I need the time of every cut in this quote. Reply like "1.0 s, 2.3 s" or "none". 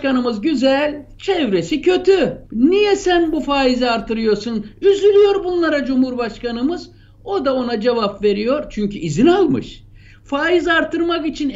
2.5 s